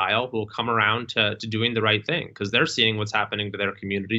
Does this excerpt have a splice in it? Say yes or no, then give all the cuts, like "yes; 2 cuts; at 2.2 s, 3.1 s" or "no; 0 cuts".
no; 0 cuts